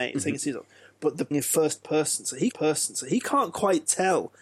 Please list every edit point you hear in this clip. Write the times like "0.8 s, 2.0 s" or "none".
1.3 s, 2.5 s